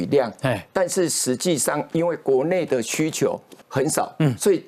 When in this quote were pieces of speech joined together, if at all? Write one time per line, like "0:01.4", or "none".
0:03.6